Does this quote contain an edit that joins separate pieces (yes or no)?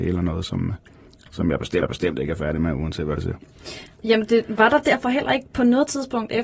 yes